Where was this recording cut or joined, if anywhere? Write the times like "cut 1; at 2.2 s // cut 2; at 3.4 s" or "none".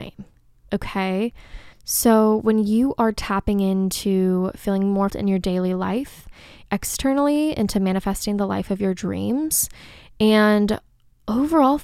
cut 1; at 1.7 s // cut 2; at 5.1 s // cut 3; at 6.7 s